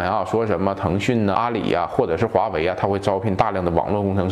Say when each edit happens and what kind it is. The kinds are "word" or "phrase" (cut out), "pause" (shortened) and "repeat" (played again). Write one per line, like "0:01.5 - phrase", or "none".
0:01.3 - word